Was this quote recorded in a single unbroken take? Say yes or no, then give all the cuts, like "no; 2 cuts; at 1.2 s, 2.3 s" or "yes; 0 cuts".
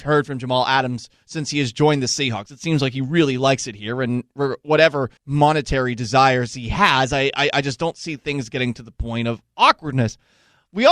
no; 1 cut; at 5.2 s